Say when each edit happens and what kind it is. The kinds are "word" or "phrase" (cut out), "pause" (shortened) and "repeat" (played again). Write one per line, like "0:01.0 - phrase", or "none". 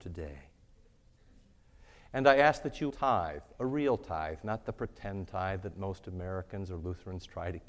0:02.9 - word